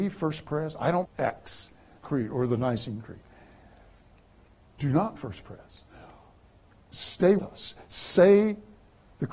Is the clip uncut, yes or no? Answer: no